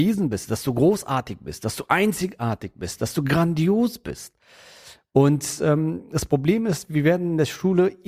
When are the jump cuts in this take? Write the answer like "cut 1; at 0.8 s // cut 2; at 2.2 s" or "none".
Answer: none